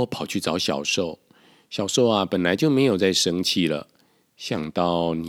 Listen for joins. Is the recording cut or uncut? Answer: uncut